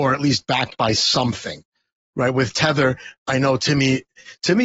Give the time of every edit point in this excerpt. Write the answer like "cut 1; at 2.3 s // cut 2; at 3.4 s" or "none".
none